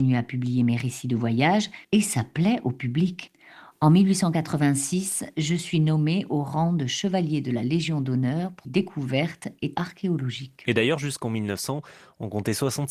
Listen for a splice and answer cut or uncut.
cut